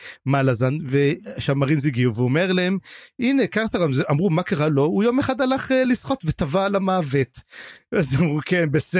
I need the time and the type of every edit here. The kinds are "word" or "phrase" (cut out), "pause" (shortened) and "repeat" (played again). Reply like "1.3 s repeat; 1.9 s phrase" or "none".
none